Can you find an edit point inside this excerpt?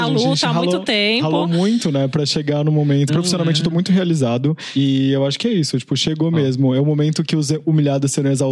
yes; 1 cut; at 3.1 s

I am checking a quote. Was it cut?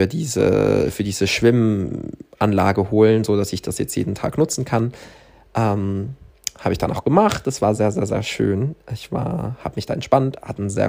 no; 0 cuts

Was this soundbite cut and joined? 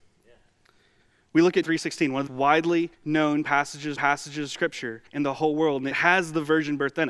yes; 6 cuts; at 1.6 s, 2.3 s, 2.9 s, 4.0 s, 5.1 s, 5.9 s

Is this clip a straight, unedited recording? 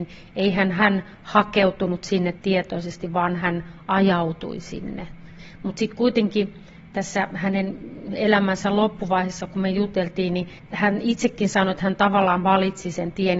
yes; 0 cuts

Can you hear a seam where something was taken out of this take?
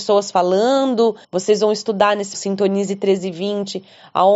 yes; 2 cuts; at 1.2 s, 2.3 s

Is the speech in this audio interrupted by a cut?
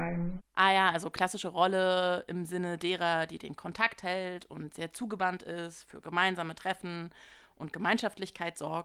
no; 0 cuts

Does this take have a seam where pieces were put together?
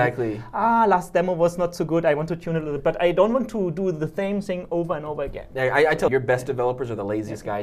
yes; 2 cuts; at 2.8 s, 6.1 s

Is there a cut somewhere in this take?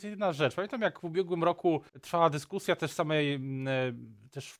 yes; 1 cut; at 1.9 s

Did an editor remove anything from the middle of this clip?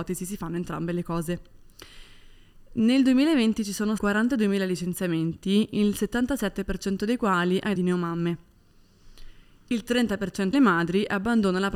yes; 3 cuts; at 4.0 s, 7.7 s, 10.5 s

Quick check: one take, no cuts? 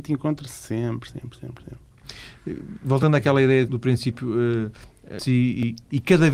no; 3 cuts; at 1.1 s, 3.7 s, 5.2 s

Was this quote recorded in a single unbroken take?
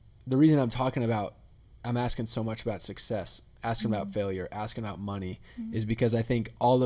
yes; 0 cuts

